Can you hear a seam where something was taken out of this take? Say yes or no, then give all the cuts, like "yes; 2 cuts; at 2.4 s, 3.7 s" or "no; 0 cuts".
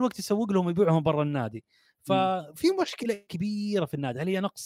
yes; 1 cut; at 3.3 s